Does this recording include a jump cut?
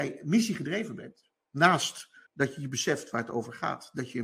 yes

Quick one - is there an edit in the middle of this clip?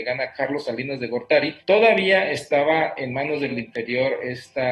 yes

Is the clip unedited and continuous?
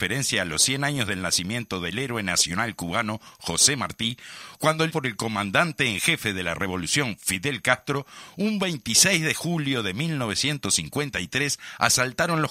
no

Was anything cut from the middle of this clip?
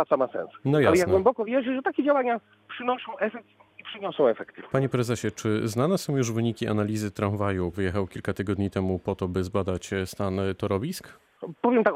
yes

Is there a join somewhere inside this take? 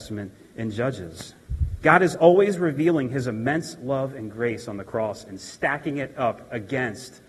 no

